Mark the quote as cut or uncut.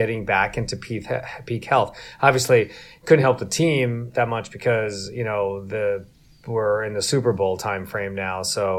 uncut